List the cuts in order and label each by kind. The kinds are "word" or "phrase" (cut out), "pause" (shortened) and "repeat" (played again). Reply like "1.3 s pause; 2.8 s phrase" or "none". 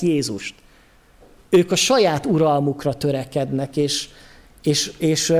none